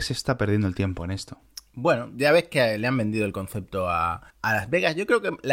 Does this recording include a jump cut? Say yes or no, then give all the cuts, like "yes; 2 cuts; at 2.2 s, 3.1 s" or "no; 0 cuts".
yes; 1 cut; at 4.3 s